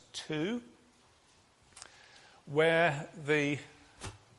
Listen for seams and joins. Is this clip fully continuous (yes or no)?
yes